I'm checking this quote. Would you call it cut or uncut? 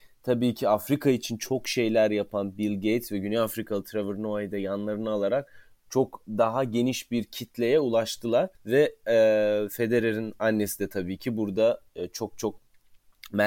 cut